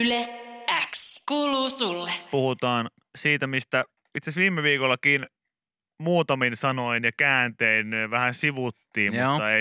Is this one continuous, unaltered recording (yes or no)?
yes